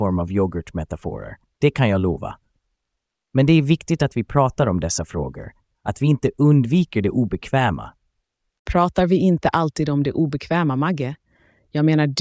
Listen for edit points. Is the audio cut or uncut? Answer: uncut